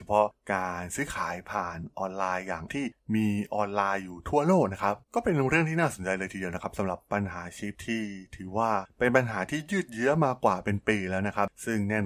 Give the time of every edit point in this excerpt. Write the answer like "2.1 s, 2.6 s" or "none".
2.7 s, 5.0 s